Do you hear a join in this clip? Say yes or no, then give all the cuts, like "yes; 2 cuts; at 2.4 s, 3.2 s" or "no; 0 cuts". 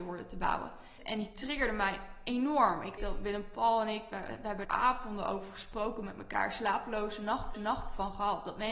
yes; 3 cuts; at 3.0 s, 4.6 s, 7.5 s